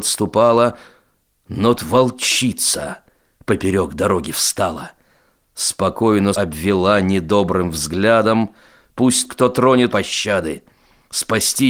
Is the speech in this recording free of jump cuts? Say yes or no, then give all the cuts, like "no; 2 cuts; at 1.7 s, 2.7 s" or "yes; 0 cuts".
no; 4 cuts; at 1.8 s, 6.3 s, 9.3 s, 9.9 s